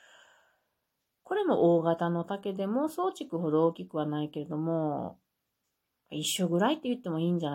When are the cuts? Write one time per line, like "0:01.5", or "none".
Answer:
none